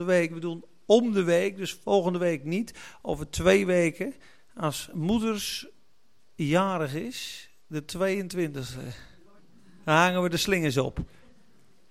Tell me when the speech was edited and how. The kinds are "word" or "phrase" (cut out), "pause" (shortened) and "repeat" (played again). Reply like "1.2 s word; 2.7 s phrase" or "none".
9.4 s pause